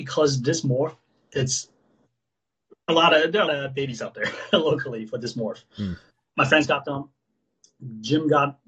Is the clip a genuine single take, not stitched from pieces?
no; 2 cuts; at 2.9 s, 3.5 s

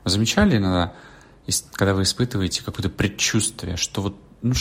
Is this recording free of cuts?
yes; 0 cuts

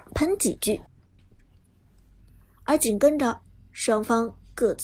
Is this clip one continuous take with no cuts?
yes; 0 cuts

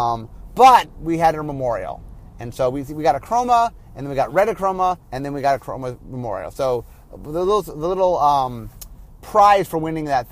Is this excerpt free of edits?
no; 1 cut; at 5.0 s

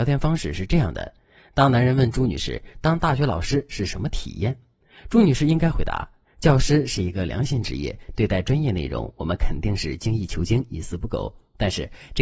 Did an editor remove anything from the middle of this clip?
no; 0 cuts

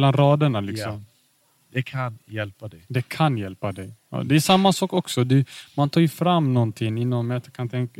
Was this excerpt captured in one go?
yes; 0 cuts

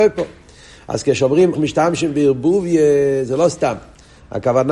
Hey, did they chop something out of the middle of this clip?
yes; 1 cut; at 1.5 s

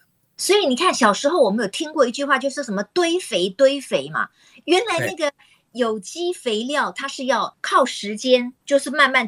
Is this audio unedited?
yes; 0 cuts

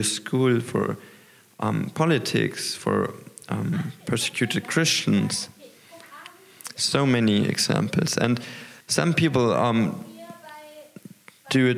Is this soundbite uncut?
no; 1 cut; at 8.8 s

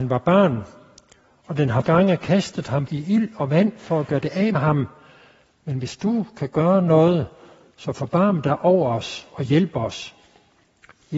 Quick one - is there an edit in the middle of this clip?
yes; 3 cuts; at 1.8 s, 2.9 s, 4.5 s

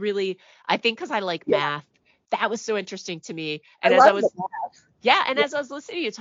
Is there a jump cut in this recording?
no; 0 cuts

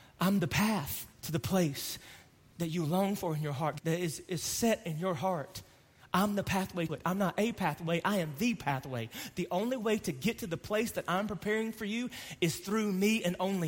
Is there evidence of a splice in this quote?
yes; 3 cuts; at 1.1 s, 3.8 s, 6.9 s

